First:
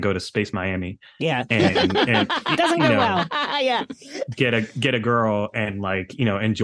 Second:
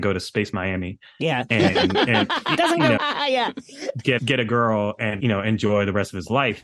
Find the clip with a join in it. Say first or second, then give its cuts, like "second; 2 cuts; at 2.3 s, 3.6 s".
second; 3 cuts; at 3.0 s, 4.2 s, 5.2 s